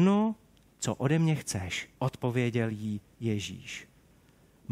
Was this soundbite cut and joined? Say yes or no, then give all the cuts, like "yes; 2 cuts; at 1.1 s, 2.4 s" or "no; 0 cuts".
yes; 1 cut; at 2.0 s